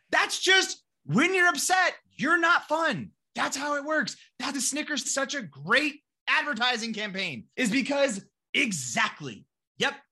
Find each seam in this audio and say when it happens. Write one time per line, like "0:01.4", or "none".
0:02.0
0:04.5
0:05.0
0:07.5